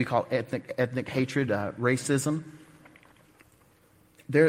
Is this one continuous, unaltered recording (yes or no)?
yes